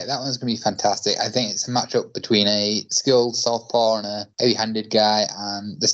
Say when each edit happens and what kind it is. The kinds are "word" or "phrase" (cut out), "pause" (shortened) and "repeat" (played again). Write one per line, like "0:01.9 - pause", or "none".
0:04.3 - pause